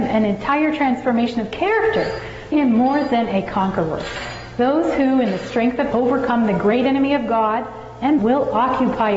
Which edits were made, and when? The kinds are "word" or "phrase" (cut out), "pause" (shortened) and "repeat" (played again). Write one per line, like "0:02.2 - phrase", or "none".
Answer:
0:02.5 - word
0:05.9 - word
0:08.2 - word